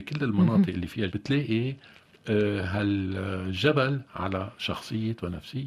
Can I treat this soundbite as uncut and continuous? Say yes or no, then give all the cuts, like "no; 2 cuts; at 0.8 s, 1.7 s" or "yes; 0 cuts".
no; 2 cuts; at 1.1 s, 4.1 s